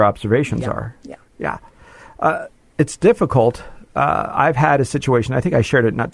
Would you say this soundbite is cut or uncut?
uncut